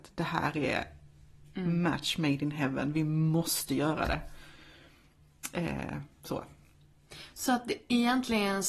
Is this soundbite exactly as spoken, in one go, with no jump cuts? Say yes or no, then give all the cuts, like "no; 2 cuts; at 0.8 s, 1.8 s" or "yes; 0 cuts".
yes; 0 cuts